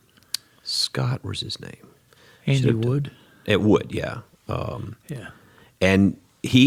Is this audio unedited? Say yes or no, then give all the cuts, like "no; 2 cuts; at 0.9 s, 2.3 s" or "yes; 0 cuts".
yes; 0 cuts